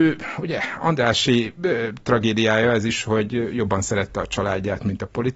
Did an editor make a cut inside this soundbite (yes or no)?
no